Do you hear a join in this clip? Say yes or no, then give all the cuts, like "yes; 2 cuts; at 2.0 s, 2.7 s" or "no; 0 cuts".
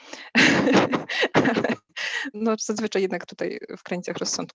yes; 1 cut; at 2.3 s